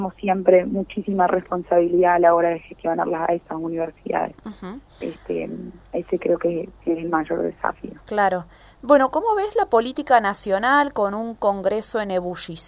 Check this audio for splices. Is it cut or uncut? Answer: uncut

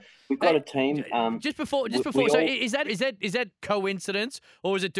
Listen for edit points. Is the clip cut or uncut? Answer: cut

